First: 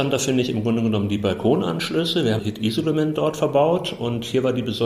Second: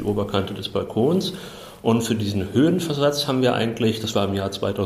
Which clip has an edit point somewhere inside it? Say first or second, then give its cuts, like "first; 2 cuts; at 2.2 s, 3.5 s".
first; 1 cut; at 2.4 s